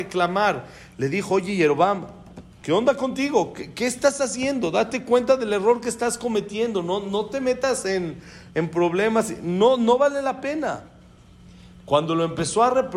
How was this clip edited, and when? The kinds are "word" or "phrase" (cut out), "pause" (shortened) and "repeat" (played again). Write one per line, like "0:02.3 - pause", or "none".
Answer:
none